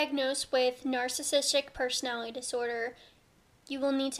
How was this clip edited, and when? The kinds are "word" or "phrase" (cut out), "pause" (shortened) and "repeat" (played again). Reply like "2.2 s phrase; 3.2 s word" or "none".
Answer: none